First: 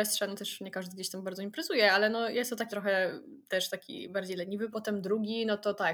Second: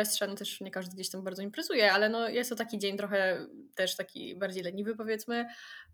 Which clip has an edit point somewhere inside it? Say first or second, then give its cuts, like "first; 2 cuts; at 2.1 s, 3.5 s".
first; 2 cuts; at 2.7 s, 4.7 s